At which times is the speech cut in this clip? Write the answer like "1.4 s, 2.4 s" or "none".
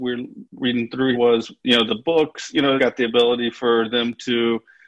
1.1 s, 1.9 s, 2.8 s

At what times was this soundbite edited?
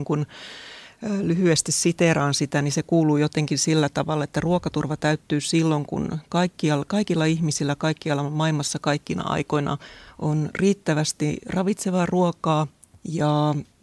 none

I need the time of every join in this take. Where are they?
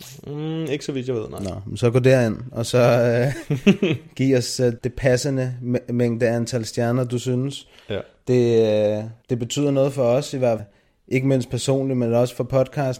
4.8 s, 9.2 s, 10.6 s

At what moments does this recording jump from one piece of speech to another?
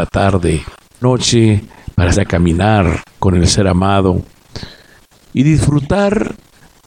1.0 s, 2.1 s

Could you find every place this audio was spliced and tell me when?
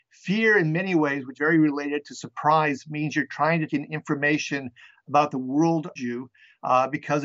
1.4 s, 3.7 s, 6.0 s

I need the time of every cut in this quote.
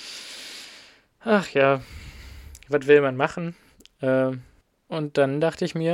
4.6 s

